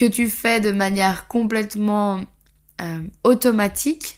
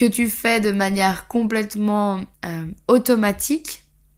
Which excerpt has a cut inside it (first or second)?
second